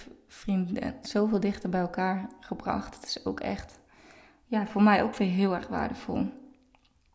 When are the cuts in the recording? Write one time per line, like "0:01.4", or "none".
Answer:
0:01.0